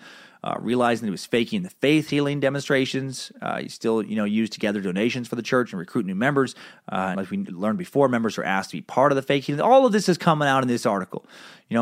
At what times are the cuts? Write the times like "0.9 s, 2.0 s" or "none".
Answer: 7.1 s